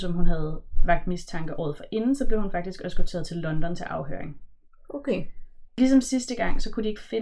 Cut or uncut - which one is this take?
cut